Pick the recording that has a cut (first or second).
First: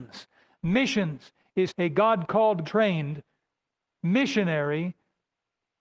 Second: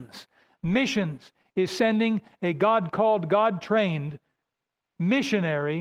first